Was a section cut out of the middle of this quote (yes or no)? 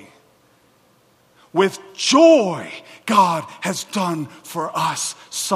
no